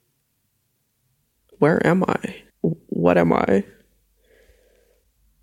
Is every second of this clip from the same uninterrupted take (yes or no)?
no